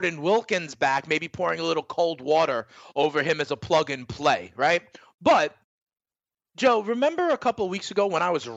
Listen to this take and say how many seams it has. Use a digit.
0